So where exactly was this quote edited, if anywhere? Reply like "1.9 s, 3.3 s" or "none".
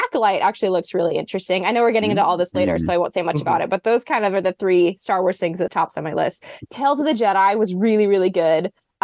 5.7 s